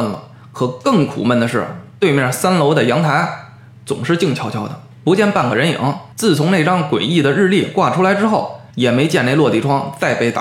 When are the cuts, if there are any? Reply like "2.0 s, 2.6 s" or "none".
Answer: 4.9 s, 6.1 s, 8.7 s